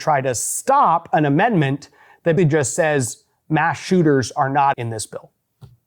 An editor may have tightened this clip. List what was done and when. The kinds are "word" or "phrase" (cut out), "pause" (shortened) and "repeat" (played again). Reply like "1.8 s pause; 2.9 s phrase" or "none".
2.4 s word; 4.7 s word